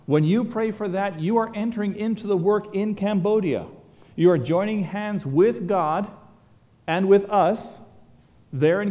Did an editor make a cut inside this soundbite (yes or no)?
no